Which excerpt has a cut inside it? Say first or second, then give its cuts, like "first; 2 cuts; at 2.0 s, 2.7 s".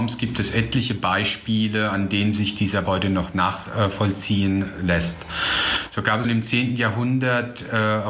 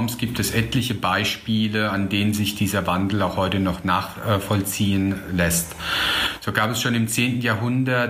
first; 2 cuts; at 2.9 s, 6.2 s